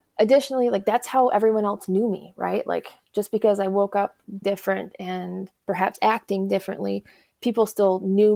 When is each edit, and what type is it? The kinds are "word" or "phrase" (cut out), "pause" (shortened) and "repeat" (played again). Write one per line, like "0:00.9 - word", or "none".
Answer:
0:04.4 - phrase
0:05.6 - pause